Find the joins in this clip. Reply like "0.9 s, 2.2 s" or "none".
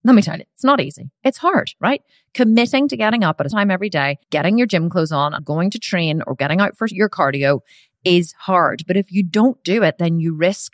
3.5 s, 4.2 s, 5.4 s